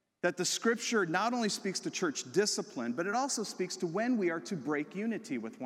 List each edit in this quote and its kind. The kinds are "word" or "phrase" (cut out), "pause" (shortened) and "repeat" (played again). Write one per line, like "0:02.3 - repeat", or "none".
none